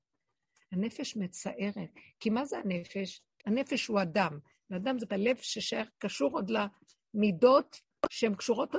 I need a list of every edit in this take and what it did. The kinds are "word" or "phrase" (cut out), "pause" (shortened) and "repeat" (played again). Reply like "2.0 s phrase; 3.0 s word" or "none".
5.1 s word